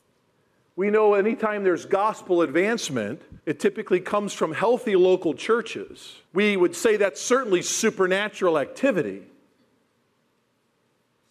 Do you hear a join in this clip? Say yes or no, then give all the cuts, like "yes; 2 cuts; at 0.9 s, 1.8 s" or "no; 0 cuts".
yes; 2 cuts; at 3.4 s, 6.3 s